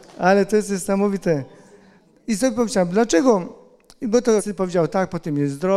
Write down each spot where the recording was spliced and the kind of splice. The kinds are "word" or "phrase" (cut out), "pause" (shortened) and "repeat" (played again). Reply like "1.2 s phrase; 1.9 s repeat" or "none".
4.4 s phrase